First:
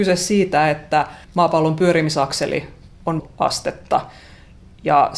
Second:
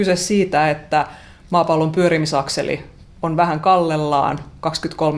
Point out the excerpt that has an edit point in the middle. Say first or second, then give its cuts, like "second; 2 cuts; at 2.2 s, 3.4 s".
first; 2 cuts; at 1.2 s, 3.2 s